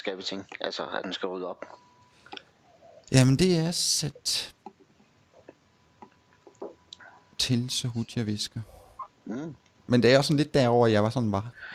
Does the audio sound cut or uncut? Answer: uncut